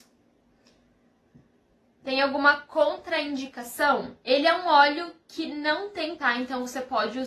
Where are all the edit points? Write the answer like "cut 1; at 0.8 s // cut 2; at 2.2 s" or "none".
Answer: cut 1; at 4.2 s // cut 2; at 6.2 s